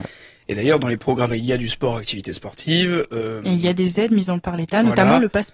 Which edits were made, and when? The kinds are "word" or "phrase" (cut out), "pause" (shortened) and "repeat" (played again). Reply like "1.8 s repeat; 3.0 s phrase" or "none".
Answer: 1.3 s word; 4.4 s word